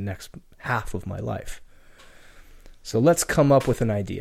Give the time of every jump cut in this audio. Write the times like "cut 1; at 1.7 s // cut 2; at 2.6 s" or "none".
none